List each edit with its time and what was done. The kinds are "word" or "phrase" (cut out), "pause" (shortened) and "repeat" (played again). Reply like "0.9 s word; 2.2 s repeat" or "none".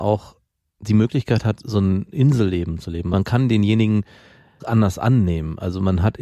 4.6 s word